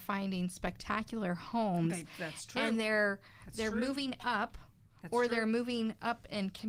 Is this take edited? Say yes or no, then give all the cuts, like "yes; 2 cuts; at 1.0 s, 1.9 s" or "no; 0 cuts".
no; 0 cuts